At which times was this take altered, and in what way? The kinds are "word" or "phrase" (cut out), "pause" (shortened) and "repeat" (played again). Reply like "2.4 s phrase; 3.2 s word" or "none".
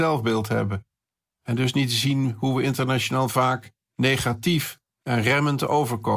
none

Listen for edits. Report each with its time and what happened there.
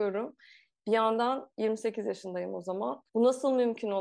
3.1 s pause

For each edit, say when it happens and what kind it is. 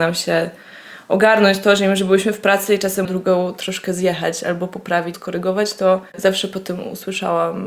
3.0 s phrase; 5.1 s word; 6.1 s pause

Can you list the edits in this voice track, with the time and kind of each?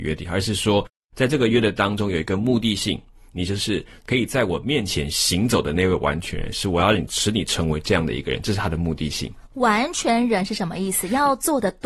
none

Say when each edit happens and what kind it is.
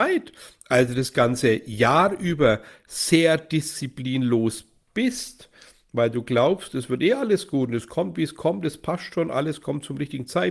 none

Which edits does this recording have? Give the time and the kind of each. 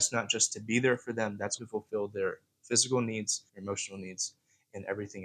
1.6 s word; 3.5 s pause

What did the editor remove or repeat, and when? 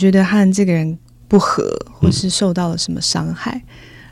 1.1 s pause

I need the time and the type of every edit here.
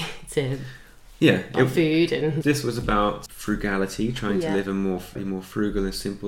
2.4 s phrase; 3.3 s word; 5.1 s word

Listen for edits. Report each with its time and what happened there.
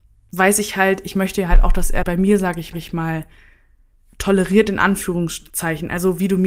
2.0 s phrase; 2.7 s repeat

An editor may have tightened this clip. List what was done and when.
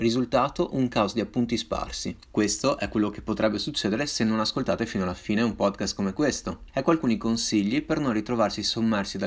none

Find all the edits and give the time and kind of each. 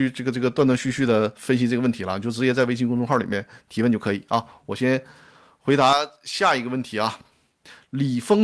none

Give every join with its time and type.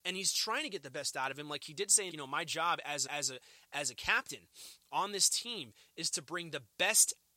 2.1 s phrase; 3.1 s repeat

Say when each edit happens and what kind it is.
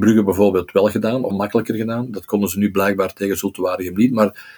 1.3 s word

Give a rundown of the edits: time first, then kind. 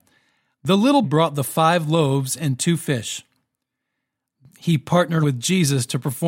1.0 s word; 5.2 s word

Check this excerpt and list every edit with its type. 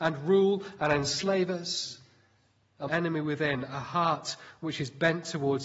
2.9 s phrase

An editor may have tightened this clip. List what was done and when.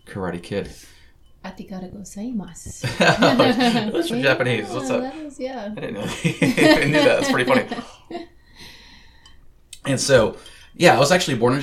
4.1 s phrase

